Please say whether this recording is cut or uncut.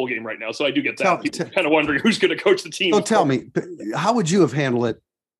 uncut